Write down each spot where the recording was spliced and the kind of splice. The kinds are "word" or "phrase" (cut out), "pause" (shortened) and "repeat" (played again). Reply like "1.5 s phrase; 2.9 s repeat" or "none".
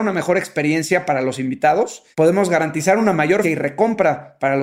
2.1 s pause; 3.4 s word